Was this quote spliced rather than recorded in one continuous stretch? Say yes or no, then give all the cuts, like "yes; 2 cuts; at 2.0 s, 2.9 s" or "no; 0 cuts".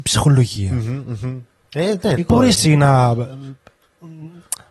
yes; 2 cuts; at 2.2 s, 2.5 s